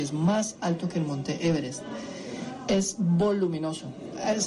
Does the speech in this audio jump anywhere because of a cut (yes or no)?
no